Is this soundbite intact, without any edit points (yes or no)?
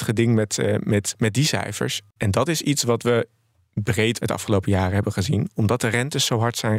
yes